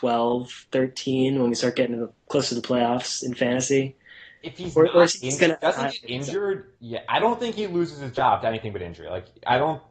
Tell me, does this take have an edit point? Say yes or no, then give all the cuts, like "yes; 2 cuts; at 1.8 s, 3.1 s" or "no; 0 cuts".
yes; 1 cut; at 6.8 s